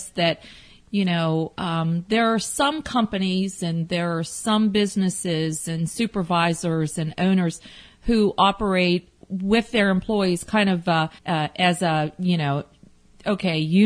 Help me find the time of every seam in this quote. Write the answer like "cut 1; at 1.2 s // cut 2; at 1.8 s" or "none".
cut 1; at 11.2 s

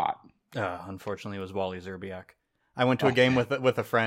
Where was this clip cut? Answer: none

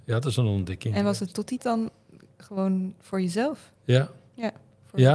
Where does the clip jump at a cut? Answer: cut 1; at 1.6 s // cut 2; at 3.8 s

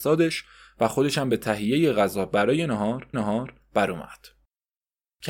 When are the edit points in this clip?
cut 1; at 3.1 s

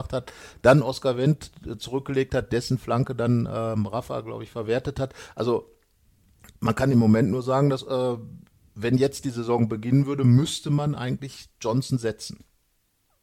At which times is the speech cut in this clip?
none

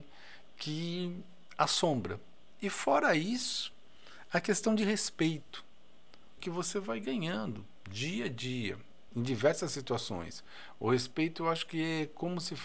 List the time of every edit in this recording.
cut 1; at 6.4 s // cut 2; at 9.1 s

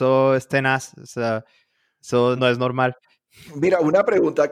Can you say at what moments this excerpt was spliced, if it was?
cut 1; at 2.4 s

